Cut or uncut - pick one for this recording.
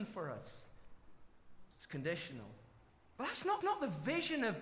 cut